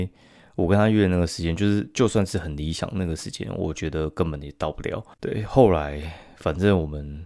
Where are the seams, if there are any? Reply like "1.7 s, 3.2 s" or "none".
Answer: 5.1 s